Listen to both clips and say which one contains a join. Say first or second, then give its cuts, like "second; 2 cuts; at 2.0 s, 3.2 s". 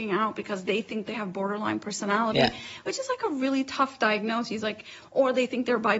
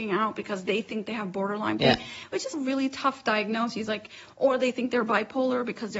second; 2 cuts; at 1.8 s, 2.5 s